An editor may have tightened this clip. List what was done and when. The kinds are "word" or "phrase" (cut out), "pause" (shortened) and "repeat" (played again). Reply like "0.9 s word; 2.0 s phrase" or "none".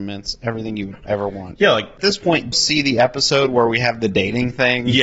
2.0 s phrase; 2.5 s word